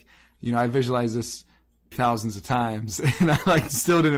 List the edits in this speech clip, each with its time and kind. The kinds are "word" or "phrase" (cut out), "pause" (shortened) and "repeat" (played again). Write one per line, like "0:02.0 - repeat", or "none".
0:01.9 - word